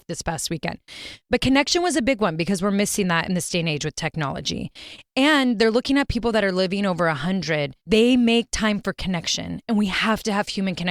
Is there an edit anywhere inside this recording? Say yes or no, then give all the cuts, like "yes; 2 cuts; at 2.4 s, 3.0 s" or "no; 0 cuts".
yes; 2 cuts; at 1.2 s, 7.8 s